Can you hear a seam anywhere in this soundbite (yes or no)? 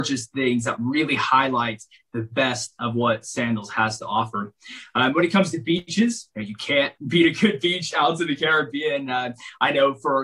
no